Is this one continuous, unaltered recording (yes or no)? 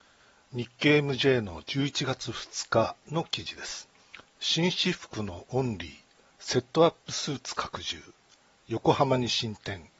yes